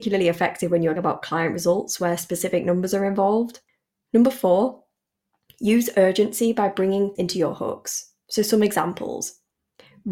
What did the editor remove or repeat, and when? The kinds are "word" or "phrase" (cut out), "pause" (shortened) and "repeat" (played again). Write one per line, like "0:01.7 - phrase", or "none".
0:01.0 - word
0:07.2 - word